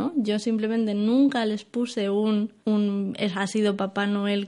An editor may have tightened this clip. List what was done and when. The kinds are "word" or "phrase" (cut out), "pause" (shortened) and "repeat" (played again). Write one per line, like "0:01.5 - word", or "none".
none